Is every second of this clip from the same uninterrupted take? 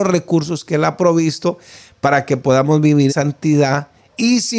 no; 1 cut; at 3.1 s

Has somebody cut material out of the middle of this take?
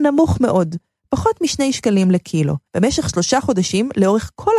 yes; 1 cut; at 2.7 s

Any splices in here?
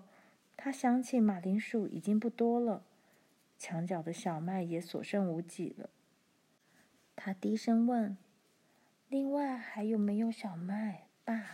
no; 0 cuts

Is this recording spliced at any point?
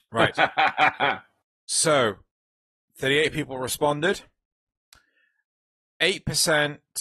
no; 0 cuts

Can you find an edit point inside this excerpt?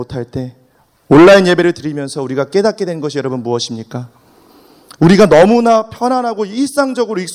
no; 0 cuts

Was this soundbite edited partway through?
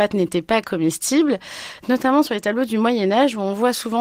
no; 0 cuts

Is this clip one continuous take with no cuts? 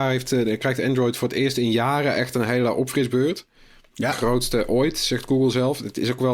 yes; 0 cuts

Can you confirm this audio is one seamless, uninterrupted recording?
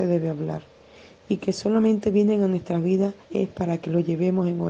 no; 1 cut; at 3.2 s

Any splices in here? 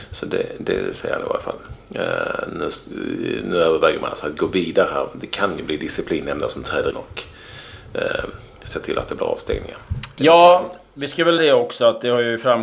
yes; 2 cuts; at 6.9 s, 11.4 s

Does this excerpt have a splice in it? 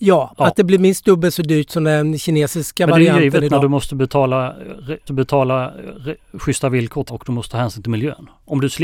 yes; 2 cuts; at 5.1 s, 7.1 s

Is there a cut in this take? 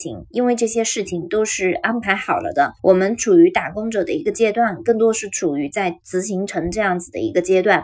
yes; 1 cut; at 2.8 s

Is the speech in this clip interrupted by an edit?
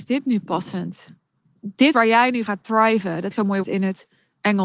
yes; 4 cuts; at 1.9 s, 2.5 s, 3.3 s, 3.6 s

